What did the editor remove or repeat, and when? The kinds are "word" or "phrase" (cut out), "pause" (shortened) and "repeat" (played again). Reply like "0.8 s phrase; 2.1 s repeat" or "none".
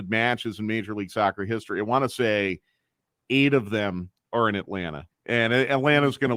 none